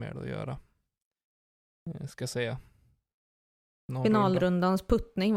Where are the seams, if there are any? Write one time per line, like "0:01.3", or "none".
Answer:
none